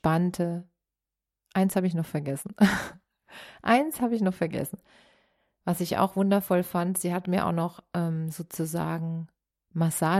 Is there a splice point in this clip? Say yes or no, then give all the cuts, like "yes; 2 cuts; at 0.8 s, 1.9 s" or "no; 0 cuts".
no; 0 cuts